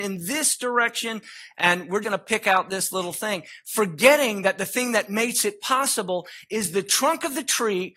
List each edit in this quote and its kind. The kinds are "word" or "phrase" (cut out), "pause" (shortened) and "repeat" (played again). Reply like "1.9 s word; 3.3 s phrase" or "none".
2.0 s word